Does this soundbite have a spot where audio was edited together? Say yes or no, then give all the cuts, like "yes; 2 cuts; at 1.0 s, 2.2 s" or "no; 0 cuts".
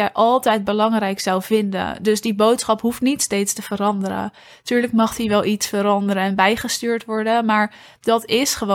no; 0 cuts